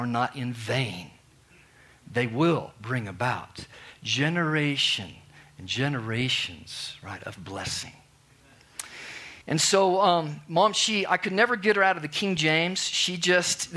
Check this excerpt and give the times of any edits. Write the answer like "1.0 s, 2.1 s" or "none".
9.4 s